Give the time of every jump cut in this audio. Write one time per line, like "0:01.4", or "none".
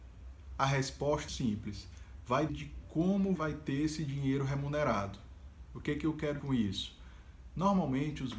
0:01.3
0:02.5
0:03.4
0:06.4